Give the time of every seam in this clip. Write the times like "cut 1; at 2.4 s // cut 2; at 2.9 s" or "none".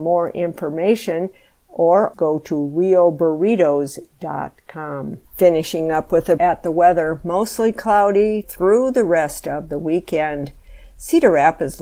cut 1; at 2.1 s // cut 2; at 5.2 s // cut 3; at 6.4 s // cut 4; at 8.4 s